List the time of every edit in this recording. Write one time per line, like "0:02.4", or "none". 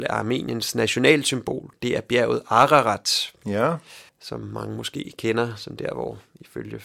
0:04.1